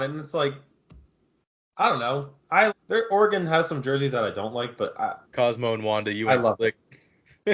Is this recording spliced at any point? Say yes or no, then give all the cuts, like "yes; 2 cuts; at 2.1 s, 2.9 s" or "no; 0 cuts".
yes; 2 cuts; at 2.7 s, 5.2 s